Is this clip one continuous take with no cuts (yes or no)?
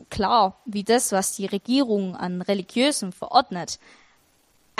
yes